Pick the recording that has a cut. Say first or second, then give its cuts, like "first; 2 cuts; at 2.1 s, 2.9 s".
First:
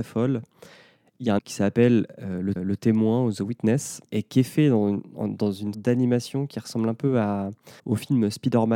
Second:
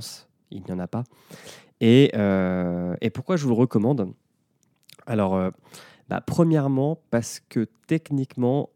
first; 5 cuts; at 1.4 s, 2.6 s, 4.1 s, 5.7 s, 7.8 s